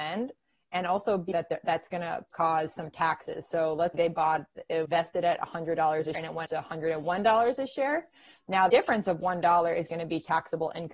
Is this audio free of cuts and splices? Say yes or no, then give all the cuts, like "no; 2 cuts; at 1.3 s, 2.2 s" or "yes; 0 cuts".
no; 7 cuts; at 1.3 s, 2.3 s, 3.9 s, 4.8 s, 6.1 s, 6.5 s, 8.7 s